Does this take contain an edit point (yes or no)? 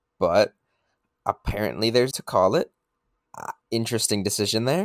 yes